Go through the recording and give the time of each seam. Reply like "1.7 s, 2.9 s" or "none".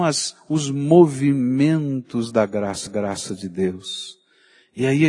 2.9 s